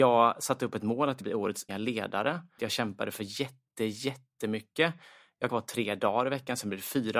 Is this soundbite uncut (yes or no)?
no